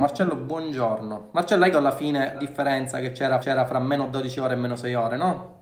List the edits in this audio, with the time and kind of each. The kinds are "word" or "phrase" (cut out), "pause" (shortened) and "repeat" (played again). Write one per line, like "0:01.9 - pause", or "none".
0:01.7 - word
0:02.3 - word
0:03.4 - repeat

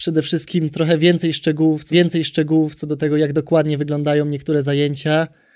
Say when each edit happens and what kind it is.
0:01.9 - repeat

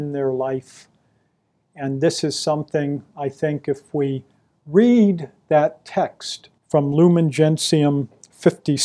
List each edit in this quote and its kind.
0:06.6 - pause

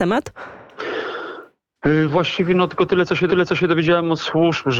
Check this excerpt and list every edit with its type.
0:03.3 - repeat

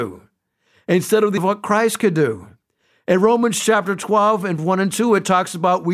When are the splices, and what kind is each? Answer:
0:01.4 - word
0:04.6 - word

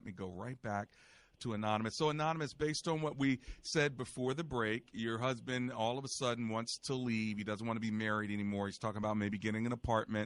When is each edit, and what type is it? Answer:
none

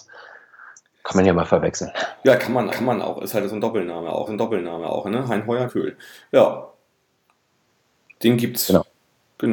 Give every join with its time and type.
0:02.7 - repeat
0:04.3 - repeat
0:05.7 - word

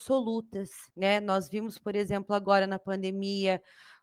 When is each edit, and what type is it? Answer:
0:00.9 - pause
0:01.8 - word

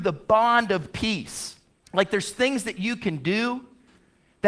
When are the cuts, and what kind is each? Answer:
0:01.7 - pause

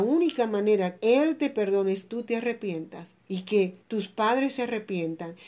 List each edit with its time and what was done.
0:01.0 - word
0:02.0 - word
0:03.2 - pause
0:03.8 - pause

